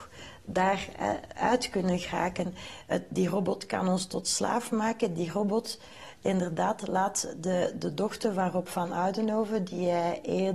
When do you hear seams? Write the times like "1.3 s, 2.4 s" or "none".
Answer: none